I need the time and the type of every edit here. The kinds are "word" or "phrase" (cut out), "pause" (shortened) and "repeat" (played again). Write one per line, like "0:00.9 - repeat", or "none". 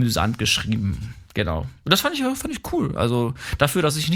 0:01.2 - pause